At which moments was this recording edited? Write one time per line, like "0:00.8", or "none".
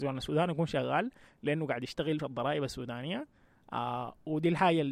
0:02.2